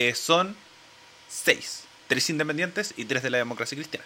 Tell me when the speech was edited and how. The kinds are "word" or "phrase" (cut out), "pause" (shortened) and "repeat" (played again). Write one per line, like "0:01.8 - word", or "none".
none